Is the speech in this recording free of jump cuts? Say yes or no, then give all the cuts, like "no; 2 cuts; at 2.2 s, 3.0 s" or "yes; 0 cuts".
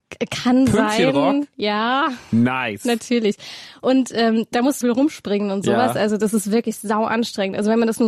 no; 1 cut; at 4.8 s